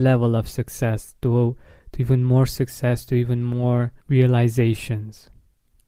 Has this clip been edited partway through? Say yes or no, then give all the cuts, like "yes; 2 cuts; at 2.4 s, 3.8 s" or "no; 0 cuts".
yes; 1 cut; at 4.0 s